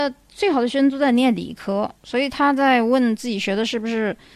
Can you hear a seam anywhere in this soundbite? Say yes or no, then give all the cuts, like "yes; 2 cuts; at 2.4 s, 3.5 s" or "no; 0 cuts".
yes; 1 cut; at 2.0 s